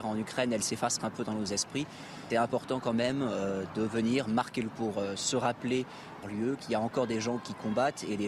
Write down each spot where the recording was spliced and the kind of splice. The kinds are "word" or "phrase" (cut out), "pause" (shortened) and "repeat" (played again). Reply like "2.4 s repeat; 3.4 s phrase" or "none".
1.0 s word; 2.3 s word; 4.7 s word; 6.2 s phrase